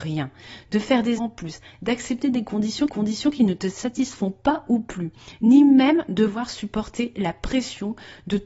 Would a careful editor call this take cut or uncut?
cut